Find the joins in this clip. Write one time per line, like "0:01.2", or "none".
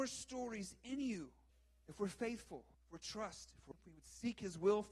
0:01.5
0:02.7
0:03.7